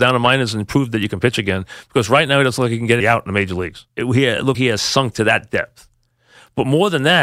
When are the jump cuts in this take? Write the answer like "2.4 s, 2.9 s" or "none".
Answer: 3.0 s, 3.9 s, 4.5 s